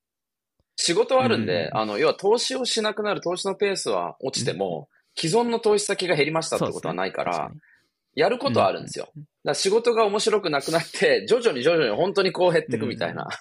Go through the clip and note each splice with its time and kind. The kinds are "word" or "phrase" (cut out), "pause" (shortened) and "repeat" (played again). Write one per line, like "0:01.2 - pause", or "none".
none